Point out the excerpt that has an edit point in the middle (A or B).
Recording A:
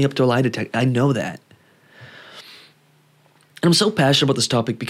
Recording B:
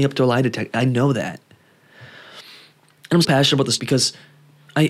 B